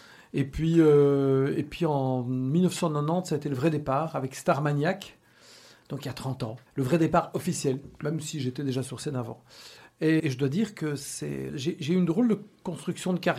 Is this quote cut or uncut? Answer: cut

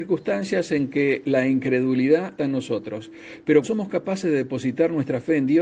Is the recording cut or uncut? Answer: cut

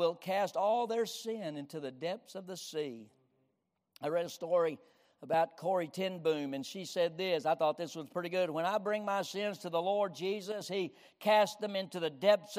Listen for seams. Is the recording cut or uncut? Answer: uncut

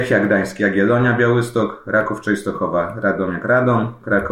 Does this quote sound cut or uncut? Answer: uncut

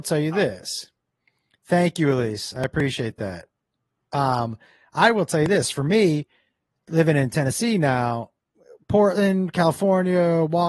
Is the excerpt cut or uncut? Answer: uncut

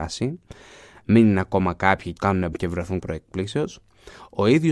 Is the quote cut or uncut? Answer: cut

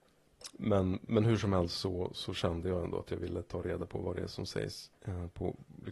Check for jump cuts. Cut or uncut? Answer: cut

